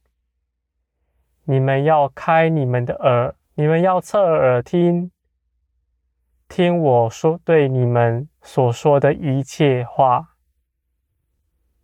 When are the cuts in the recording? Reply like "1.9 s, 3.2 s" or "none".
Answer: 3.4 s, 8.3 s